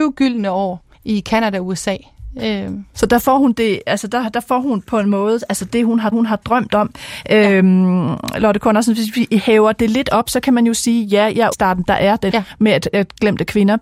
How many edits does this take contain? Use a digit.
4